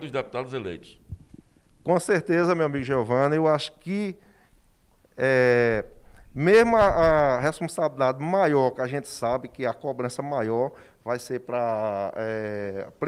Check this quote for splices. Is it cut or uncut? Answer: uncut